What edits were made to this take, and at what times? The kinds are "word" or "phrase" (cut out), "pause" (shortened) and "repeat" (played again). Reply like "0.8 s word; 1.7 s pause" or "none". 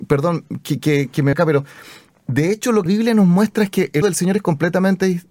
1.3 s word; 2.9 s word; 4.0 s word